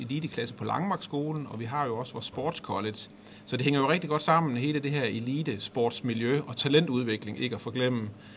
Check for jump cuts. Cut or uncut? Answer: uncut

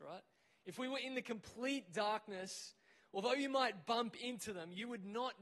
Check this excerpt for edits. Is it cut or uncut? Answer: uncut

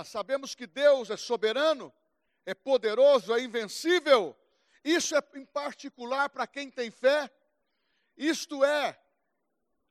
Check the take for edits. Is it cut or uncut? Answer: uncut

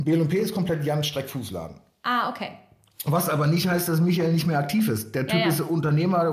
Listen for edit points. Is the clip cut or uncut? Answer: uncut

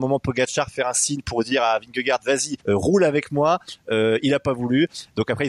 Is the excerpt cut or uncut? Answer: cut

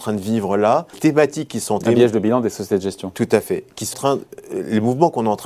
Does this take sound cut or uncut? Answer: cut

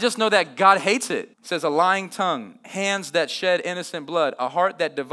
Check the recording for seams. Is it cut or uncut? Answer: cut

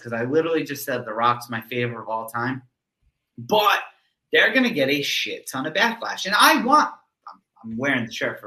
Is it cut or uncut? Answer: uncut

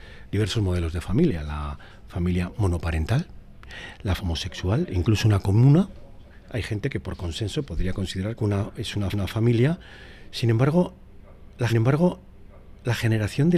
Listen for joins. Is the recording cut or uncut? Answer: cut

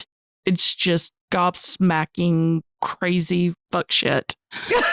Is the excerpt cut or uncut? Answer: cut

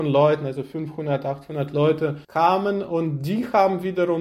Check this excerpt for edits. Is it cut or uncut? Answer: cut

